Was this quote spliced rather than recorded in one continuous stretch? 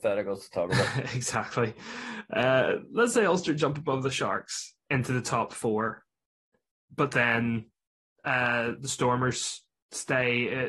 no; 0 cuts

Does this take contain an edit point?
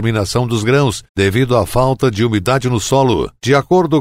yes; 1 cut; at 1.1 s

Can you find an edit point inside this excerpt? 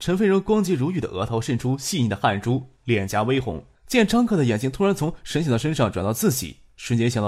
yes; 1 cut; at 3.7 s

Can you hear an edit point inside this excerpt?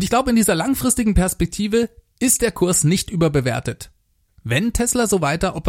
no; 0 cuts

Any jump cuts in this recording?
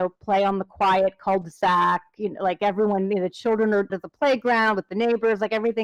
yes; 1 cut; at 3.9 s

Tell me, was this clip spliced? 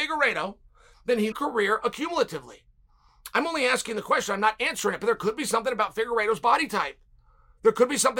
yes; 1 cut; at 1.3 s

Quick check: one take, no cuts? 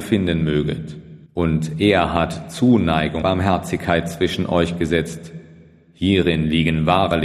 no; 2 cuts; at 1.3 s, 3.2 s

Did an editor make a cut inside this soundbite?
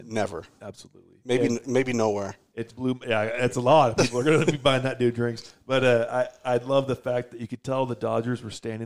yes; 1 cut; at 2.7 s

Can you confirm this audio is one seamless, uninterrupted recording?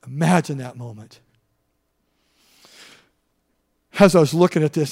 yes; 0 cuts

